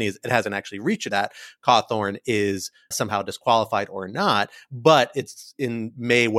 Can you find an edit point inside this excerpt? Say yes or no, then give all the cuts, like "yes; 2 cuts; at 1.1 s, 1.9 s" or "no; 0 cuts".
yes; 2 cuts; at 1.1 s, 2.9 s